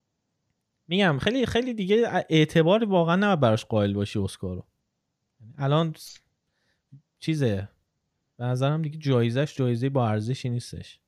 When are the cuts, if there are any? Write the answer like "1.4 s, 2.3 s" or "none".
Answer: none